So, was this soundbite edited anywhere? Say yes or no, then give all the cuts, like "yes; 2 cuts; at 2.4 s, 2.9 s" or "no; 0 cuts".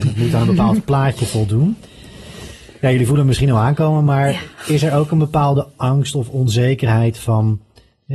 no; 0 cuts